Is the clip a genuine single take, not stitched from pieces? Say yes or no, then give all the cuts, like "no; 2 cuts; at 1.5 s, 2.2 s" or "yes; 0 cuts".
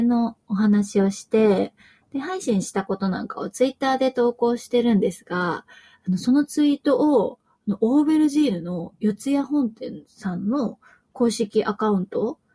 yes; 0 cuts